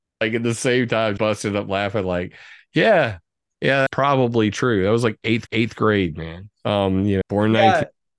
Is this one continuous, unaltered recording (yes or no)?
no